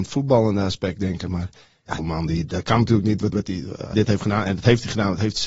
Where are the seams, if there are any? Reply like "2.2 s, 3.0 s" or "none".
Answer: 2.0 s, 3.3 s, 3.9 s

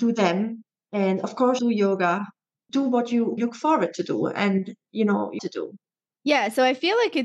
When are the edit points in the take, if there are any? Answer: 1.6 s, 3.4 s, 5.4 s

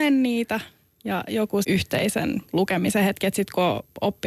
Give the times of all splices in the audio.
1.6 s

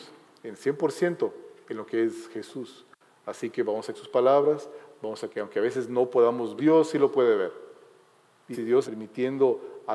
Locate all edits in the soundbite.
3.9 s, 5.3 s, 6.6 s, 8.5 s, 8.8 s

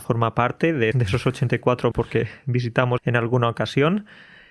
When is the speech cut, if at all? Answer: 0.9 s, 1.9 s, 3.0 s

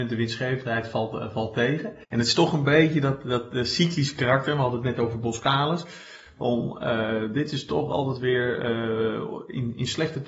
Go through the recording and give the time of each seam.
2.0 s

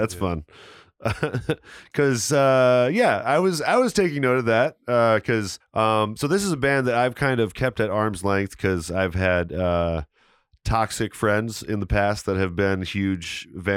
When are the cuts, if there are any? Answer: 5.6 s

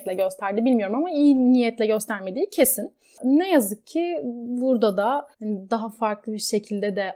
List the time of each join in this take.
5.3 s

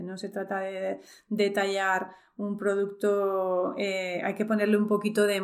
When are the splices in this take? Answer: none

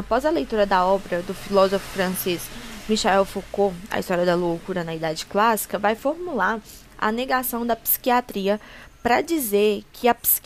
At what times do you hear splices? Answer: none

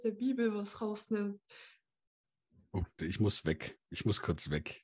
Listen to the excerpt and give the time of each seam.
3.0 s

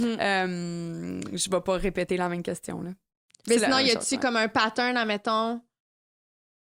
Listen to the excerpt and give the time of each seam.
none

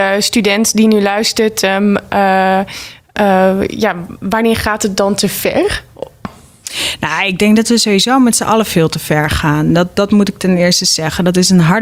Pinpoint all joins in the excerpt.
none

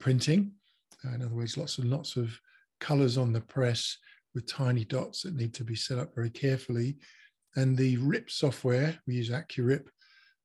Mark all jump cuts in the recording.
none

